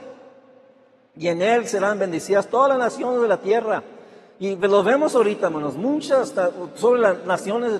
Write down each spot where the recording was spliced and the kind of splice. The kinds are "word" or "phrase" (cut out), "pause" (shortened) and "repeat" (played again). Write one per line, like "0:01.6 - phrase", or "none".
none